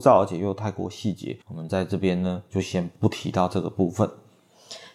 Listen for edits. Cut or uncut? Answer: cut